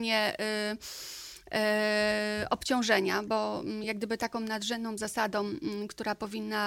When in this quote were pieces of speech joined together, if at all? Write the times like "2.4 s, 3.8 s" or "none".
none